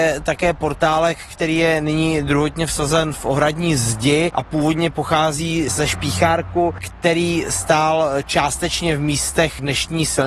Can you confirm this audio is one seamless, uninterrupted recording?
yes; 0 cuts

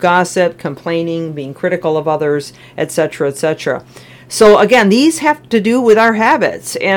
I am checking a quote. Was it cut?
no; 0 cuts

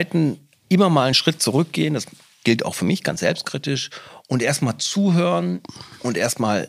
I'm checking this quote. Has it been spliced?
no; 0 cuts

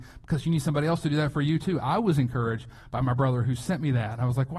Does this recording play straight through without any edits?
yes; 0 cuts

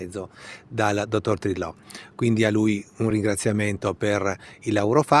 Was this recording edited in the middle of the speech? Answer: no; 0 cuts

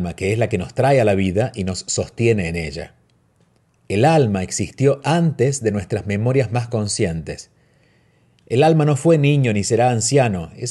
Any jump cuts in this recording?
no; 0 cuts

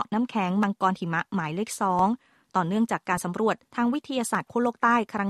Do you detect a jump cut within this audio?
yes; 1 cut; at 3.7 s

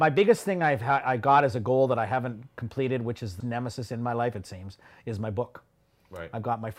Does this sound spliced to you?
yes; 1 cut; at 3.4 s

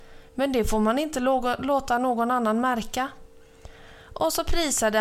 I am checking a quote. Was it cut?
no; 0 cuts

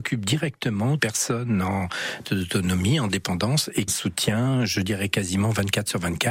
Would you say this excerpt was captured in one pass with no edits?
no; 3 cuts; at 1.0 s, 2.2 s, 3.9 s

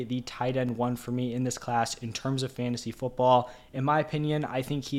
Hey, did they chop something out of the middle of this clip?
no; 0 cuts

